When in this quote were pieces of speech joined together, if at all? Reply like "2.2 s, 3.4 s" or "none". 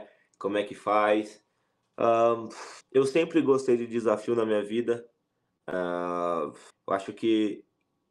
2.8 s, 6.7 s